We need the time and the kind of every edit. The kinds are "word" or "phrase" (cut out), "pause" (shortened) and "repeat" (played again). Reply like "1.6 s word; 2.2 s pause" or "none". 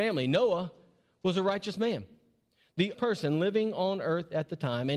2.9 s phrase